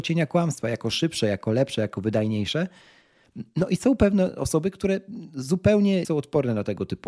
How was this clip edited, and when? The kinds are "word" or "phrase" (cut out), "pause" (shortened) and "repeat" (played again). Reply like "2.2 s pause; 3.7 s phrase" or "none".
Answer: 6.0 s word